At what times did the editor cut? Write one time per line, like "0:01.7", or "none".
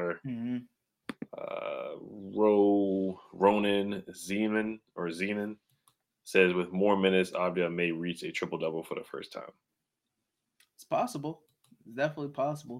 none